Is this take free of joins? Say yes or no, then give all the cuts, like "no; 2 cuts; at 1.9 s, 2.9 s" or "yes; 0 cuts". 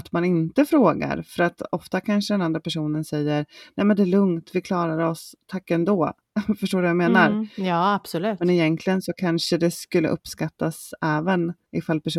yes; 0 cuts